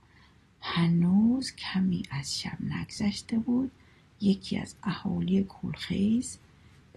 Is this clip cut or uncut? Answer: uncut